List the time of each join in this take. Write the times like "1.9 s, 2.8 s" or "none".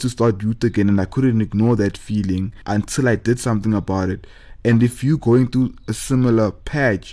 2.6 s